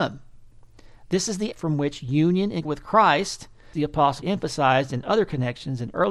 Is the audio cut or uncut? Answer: cut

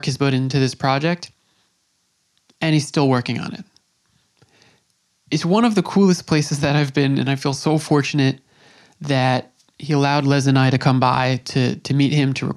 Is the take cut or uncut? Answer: uncut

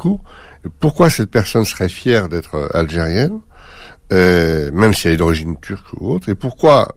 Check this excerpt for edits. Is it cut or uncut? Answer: uncut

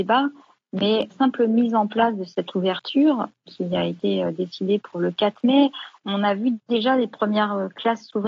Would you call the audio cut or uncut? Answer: cut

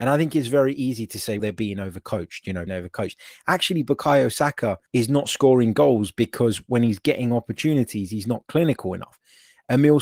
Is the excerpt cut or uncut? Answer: cut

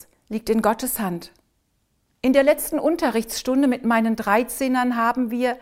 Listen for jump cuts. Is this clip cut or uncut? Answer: uncut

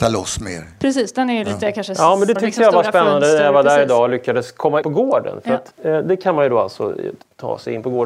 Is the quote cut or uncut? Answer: cut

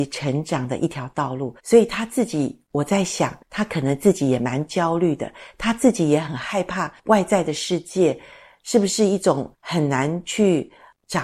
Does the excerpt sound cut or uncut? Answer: cut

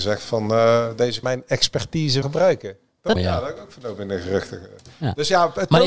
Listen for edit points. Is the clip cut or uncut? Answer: cut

